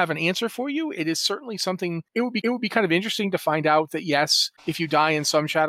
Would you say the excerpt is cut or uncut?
cut